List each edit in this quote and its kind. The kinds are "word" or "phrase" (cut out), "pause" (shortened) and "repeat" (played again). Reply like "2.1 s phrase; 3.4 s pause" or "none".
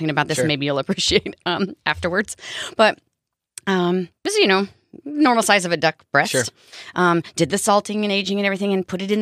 4.2 s pause